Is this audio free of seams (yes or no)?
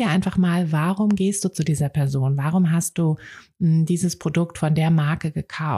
yes